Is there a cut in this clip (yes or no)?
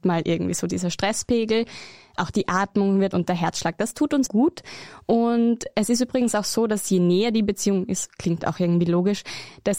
yes